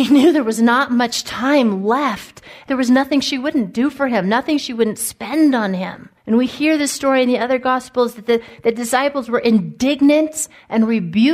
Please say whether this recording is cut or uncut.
cut